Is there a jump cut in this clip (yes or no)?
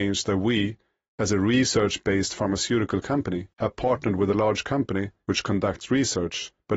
yes